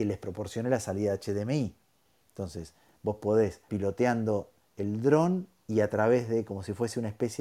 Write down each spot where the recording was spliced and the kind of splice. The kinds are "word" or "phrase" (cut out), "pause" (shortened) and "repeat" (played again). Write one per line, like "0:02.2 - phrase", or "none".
0:03.7 - word